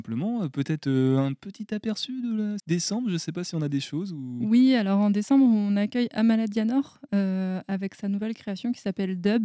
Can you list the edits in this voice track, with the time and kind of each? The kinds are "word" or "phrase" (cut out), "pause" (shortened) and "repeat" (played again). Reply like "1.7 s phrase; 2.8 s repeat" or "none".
2.6 s word